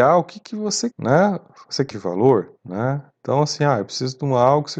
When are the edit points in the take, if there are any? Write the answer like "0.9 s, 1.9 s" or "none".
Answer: 0.9 s, 1.9 s, 2.6 s

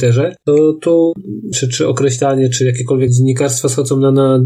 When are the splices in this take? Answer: 1.5 s, 3.1 s

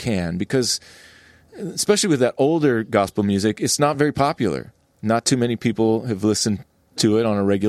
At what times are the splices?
none

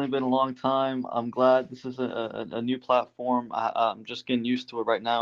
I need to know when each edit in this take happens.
none

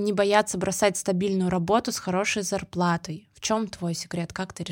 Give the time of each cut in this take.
none

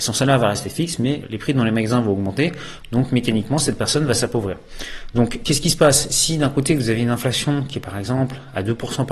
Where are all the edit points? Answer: 1.2 s

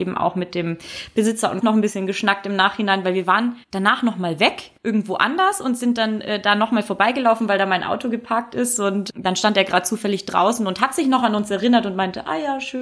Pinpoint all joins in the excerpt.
1.6 s, 3.6 s, 4.8 s

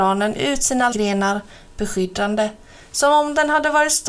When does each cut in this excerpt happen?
0.9 s

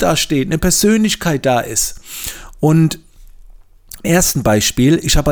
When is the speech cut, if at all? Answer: 4.0 s

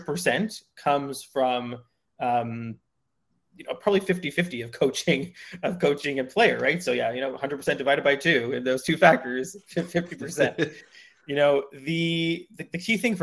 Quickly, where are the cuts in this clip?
none

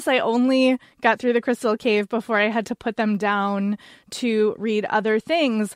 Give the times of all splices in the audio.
none

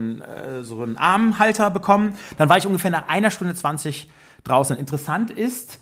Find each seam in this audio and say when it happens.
none

